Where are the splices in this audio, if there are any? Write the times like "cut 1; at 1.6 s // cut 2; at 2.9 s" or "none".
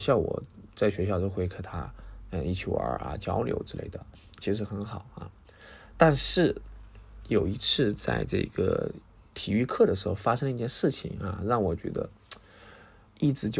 none